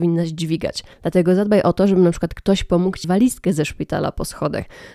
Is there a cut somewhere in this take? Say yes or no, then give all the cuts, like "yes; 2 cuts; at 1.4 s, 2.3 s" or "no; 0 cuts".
yes; 2 cuts; at 0.9 s, 3.0 s